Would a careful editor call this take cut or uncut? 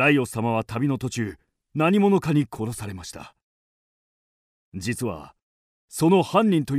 uncut